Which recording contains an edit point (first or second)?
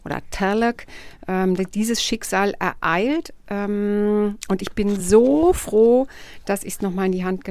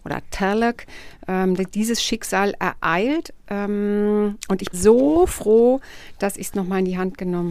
second